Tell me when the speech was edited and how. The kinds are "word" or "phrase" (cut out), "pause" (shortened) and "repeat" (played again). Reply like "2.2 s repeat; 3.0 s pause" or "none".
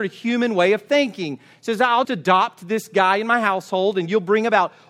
2.0 s word